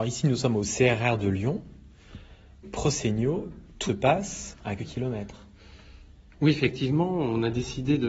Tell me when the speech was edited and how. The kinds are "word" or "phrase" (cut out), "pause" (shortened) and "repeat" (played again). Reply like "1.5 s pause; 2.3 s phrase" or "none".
2.6 s word; 3.9 s word; 4.8 s word

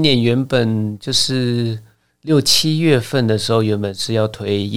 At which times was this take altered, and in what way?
none

